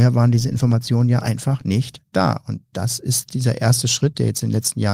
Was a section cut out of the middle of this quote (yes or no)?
no